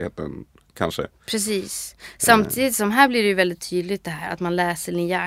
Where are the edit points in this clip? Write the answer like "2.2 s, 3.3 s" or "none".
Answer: none